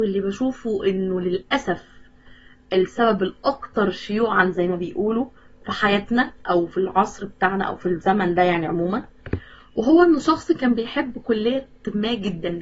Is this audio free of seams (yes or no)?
yes